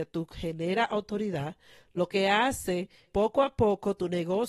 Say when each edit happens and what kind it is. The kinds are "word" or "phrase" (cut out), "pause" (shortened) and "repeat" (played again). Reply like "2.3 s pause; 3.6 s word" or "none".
3.1 s word